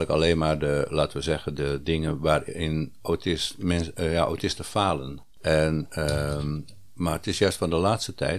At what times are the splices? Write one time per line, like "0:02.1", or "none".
0:05.3